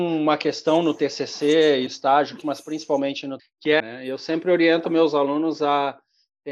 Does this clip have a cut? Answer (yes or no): yes